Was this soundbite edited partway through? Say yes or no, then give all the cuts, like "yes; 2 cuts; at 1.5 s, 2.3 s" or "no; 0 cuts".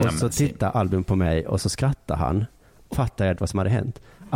yes; 2 cuts; at 2.9 s, 3.3 s